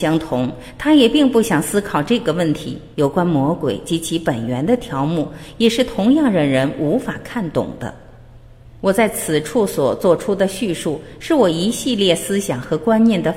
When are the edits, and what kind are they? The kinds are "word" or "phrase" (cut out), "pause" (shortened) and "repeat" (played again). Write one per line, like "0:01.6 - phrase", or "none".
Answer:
0:02.9 - pause
0:08.8 - pause